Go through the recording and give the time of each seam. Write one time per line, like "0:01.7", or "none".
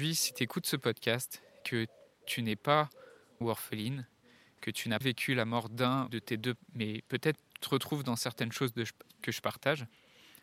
0:01.6
0:03.4
0:05.0
0:06.1
0:06.6
0:07.6